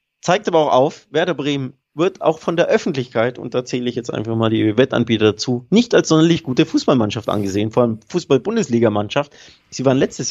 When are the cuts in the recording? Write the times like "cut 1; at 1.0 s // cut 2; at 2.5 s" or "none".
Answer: none